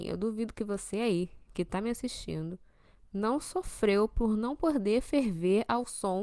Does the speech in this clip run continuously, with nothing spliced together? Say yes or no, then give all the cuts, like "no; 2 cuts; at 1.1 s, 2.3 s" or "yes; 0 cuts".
yes; 0 cuts